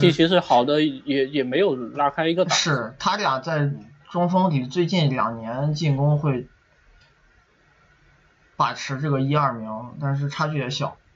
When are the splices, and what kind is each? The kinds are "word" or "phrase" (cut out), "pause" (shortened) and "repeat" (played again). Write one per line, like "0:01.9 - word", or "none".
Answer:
none